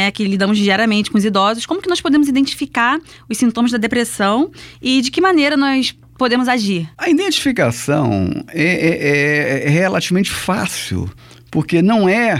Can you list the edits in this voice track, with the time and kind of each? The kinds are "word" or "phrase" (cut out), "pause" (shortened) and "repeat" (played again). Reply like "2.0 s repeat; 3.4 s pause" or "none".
none